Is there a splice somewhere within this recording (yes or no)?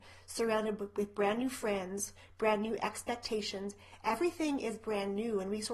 no